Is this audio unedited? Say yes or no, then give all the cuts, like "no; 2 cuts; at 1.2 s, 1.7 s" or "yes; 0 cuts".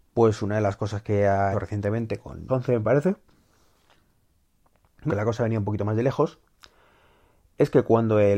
no; 3 cuts; at 1.5 s, 2.5 s, 5.1 s